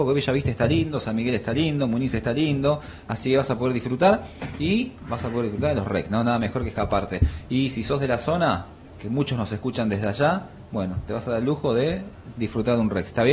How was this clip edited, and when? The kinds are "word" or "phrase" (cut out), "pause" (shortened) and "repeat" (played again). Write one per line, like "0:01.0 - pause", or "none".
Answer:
none